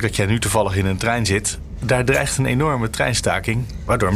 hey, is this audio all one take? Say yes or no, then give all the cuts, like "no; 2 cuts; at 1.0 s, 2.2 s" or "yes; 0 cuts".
yes; 0 cuts